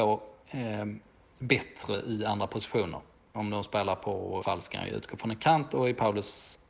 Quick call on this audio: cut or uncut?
cut